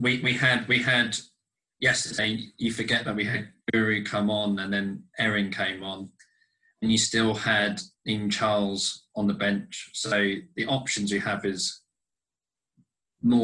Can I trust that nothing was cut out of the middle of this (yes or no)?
no